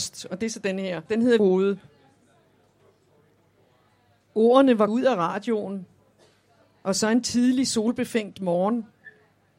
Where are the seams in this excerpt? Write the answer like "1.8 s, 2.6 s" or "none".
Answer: 1.1 s, 1.4 s, 4.9 s